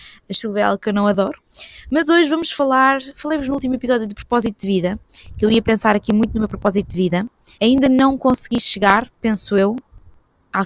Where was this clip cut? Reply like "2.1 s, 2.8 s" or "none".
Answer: 7.6 s

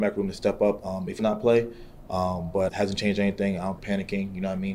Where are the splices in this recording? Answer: 1.2 s, 2.7 s, 3.8 s

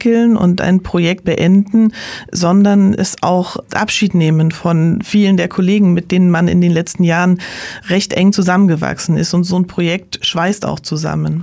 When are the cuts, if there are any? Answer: 1.2 s, 3.7 s

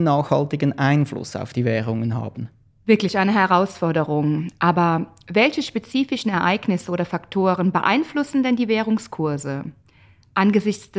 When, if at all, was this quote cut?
none

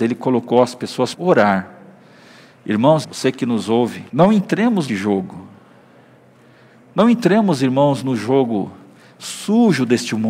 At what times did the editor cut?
1.1 s, 3.0 s, 4.1 s, 4.9 s

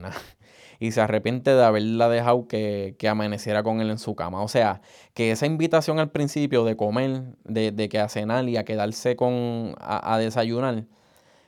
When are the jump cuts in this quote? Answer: none

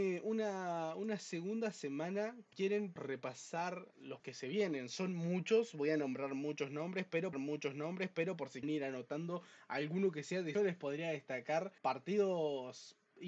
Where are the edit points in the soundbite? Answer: 2.5 s, 3.0 s, 4.2 s, 7.3 s, 8.6 s, 10.5 s, 11.8 s

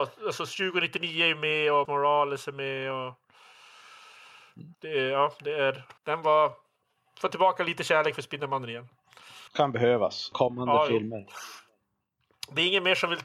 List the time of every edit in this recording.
1.8 s, 4.7 s, 6.0 s, 9.5 s, 10.3 s

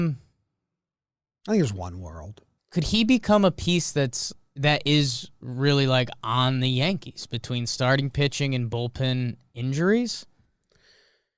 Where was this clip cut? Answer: 2.6 s

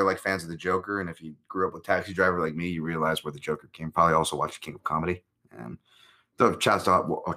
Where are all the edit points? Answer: 1.4 s, 3.9 s

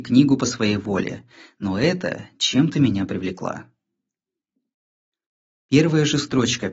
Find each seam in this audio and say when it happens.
none

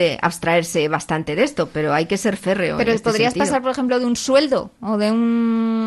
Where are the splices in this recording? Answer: 4.8 s

